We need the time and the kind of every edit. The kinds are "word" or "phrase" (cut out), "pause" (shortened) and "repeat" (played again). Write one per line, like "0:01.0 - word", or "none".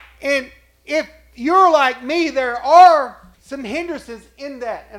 0:03.3 - pause